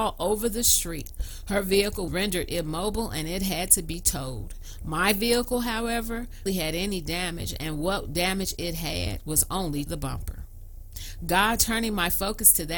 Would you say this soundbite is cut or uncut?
cut